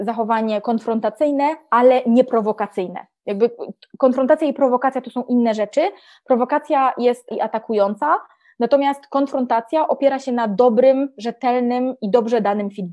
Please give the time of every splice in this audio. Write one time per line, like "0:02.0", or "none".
0:07.3